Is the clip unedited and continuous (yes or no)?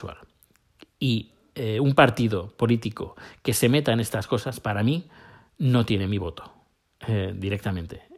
yes